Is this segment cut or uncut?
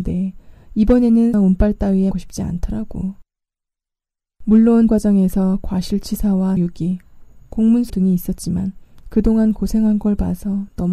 cut